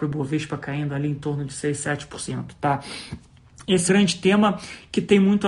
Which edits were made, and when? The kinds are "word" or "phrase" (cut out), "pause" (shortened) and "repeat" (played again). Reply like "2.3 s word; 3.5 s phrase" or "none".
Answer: 3.9 s phrase